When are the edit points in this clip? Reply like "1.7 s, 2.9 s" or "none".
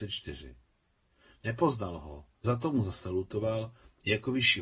2.4 s